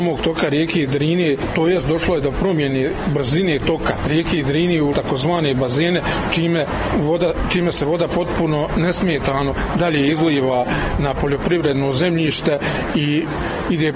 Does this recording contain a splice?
yes; 1 cut; at 4.9 s

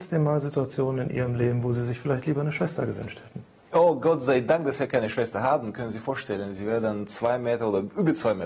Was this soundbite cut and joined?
no; 0 cuts

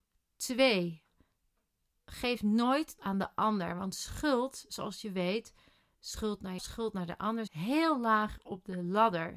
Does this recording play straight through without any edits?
no; 3 cuts; at 3.0 s, 6.6 s, 7.5 s

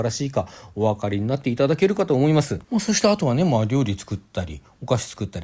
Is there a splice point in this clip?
yes; 1 cut; at 2.6 s

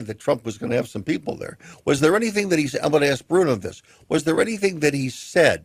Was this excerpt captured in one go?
yes; 0 cuts

